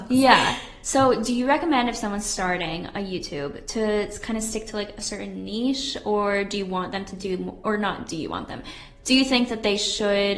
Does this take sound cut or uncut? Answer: uncut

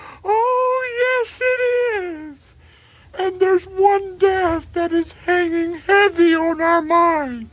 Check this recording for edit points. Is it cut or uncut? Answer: uncut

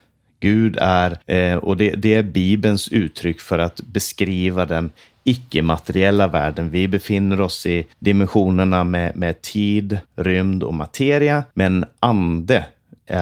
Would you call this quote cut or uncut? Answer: cut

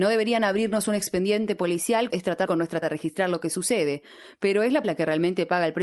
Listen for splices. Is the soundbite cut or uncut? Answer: cut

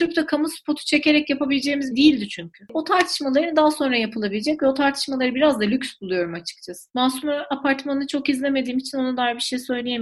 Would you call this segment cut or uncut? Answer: cut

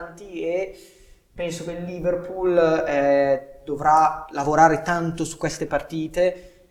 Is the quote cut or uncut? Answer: uncut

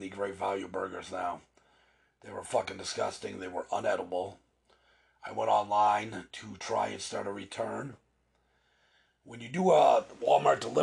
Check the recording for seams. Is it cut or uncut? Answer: uncut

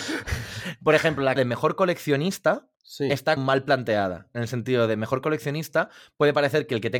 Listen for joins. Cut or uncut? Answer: cut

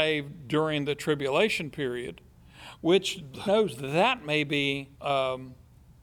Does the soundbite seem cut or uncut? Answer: cut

